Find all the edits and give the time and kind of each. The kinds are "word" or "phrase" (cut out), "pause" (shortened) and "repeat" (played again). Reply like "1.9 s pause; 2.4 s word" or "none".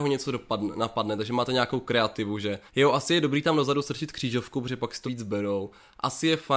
2.7 s pause; 5.0 s word

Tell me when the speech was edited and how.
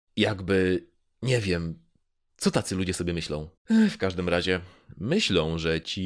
3.6 s pause

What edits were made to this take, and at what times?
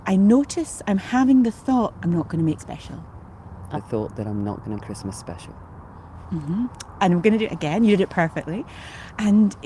1.9 s word; 2.6 s word; 3.7 s phrase; 4.8 s word

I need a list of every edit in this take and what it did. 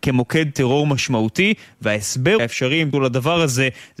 2.4 s word; 2.9 s word

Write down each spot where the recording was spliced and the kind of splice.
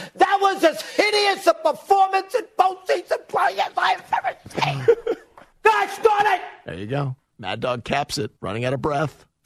7.3 s pause; 8.4 s pause

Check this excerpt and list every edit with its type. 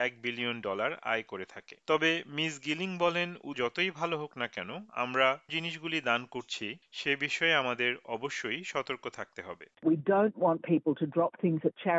1.8 s pause; 3.5 s word; 5.5 s word

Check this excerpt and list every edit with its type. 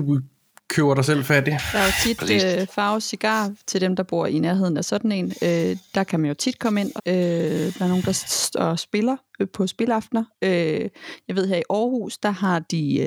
7.0 s word

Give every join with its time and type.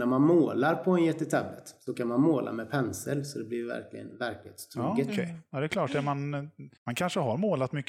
6.8 s pause

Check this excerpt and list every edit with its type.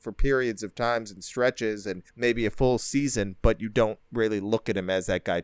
2.1 s pause

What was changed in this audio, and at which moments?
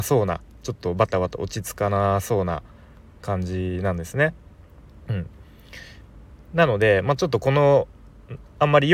none

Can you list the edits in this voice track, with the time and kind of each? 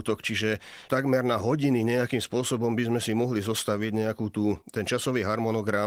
4.6 s pause

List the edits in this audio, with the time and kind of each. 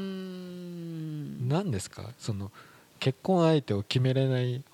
none

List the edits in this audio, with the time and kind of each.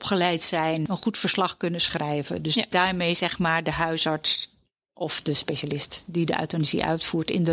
none

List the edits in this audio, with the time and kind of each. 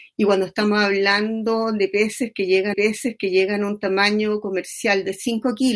2.7 s repeat

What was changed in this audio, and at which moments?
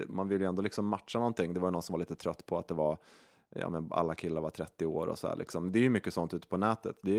none

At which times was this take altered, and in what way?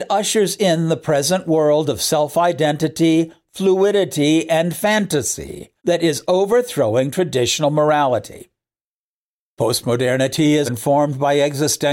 5.8 s pause; 10.7 s word

